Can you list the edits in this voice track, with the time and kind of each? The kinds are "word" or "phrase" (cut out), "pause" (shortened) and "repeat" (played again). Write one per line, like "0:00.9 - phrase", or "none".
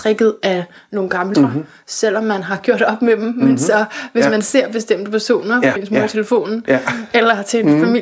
0:01.3 - word
0:05.8 - word